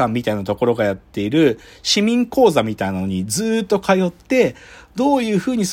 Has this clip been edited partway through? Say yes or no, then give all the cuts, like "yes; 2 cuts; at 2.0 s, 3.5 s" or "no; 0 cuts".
no; 0 cuts